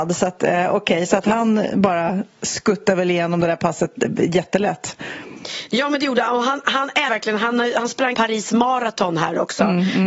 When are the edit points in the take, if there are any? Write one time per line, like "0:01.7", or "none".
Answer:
0:07.1
0:08.1